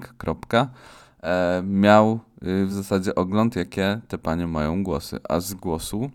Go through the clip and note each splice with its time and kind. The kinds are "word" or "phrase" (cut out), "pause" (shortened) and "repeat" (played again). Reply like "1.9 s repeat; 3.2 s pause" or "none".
none